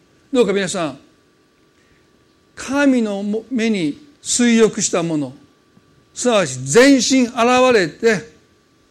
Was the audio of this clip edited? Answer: yes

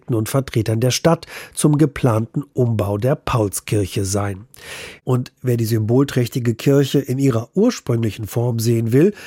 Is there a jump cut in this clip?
no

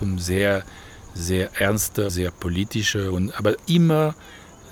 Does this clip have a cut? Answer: yes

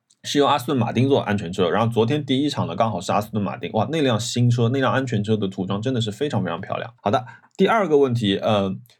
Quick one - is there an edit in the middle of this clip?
yes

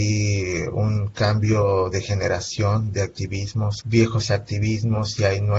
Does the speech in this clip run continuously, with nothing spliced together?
no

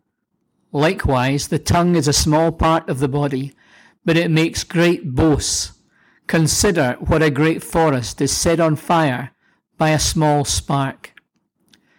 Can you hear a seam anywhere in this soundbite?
no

